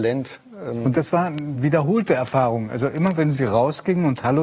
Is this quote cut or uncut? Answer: uncut